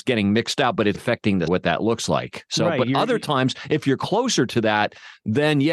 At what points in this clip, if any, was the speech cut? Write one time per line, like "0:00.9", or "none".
0:00.9
0:01.5